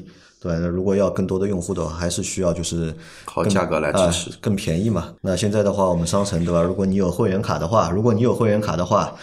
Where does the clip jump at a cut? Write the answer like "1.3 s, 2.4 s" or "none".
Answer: 5.2 s